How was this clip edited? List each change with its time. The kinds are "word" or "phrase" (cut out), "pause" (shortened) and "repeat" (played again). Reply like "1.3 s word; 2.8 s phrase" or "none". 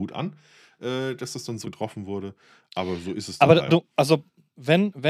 1.6 s word; 3.7 s word